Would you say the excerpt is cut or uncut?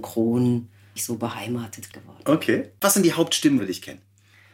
cut